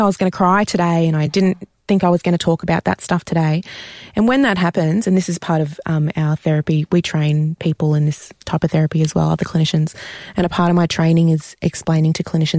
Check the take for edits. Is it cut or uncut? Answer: uncut